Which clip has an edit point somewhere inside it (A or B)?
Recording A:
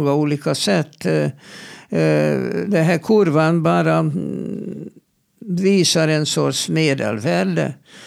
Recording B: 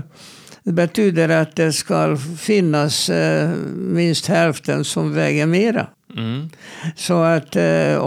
B